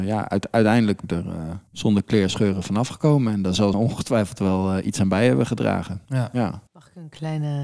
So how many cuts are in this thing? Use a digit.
5